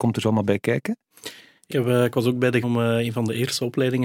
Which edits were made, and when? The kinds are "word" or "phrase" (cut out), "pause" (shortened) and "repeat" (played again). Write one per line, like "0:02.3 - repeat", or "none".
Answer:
0:01.7 - word
0:02.6 - word

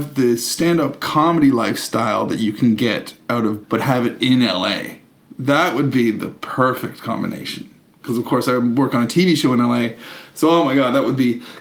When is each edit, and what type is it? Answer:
0:03.6 - word

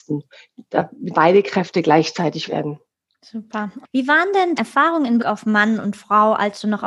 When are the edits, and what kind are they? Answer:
0:01.1 - word
0:02.5 - word
0:02.9 - pause
0:04.6 - word
0:05.2 - word

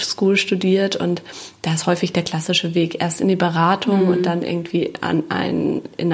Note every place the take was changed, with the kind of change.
none

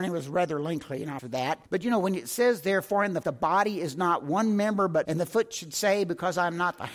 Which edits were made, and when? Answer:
0:01.2 - word
0:01.7 - pause
0:03.2 - word
0:05.0 - word

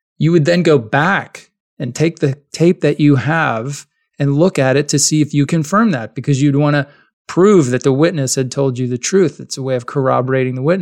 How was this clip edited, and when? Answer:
0:05.5 - word

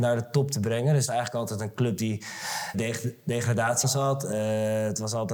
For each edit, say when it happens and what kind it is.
0:01.1 - word
0:02.7 - phrase
0:03.8 - word

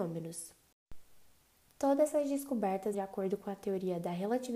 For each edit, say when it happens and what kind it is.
0:02.9 - word

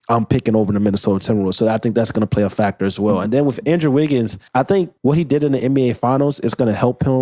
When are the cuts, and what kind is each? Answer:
0:04.5 - pause
0:05.0 - pause

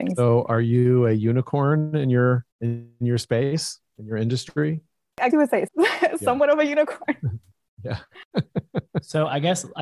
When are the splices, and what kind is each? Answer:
0:02.5 - pause
0:05.3 - word
0:05.7 - word

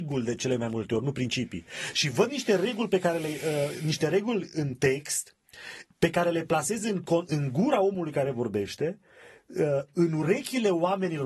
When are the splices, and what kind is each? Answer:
none

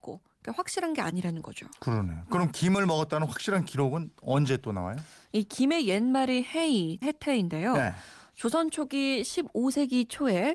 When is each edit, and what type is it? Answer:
0:07.0 - word

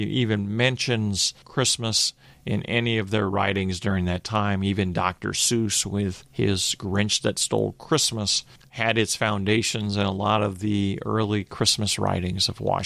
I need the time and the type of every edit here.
none

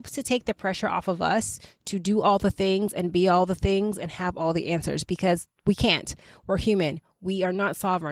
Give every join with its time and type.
none

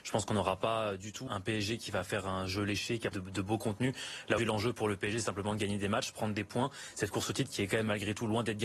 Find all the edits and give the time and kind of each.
0:01.3 - word
0:03.1 - word
0:04.4 - word

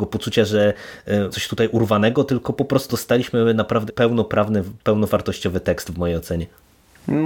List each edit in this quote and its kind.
0:01.3 - word
0:02.9 - word
0:03.9 - word

